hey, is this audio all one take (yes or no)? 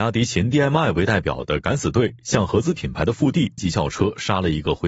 no